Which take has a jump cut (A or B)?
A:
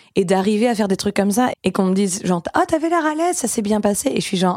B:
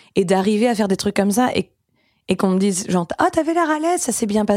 A